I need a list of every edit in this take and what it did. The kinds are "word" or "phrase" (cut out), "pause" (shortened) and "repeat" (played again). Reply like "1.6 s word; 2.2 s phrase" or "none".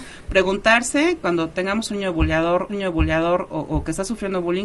2.7 s repeat